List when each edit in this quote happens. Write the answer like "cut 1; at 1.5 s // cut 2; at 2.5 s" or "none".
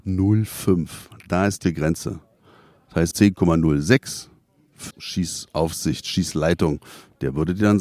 cut 1; at 1.6 s // cut 2; at 3.1 s // cut 3; at 4.9 s